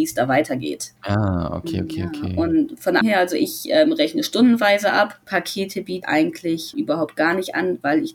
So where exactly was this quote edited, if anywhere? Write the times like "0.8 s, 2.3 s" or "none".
1.0 s, 3.0 s, 5.2 s, 6.0 s, 6.7 s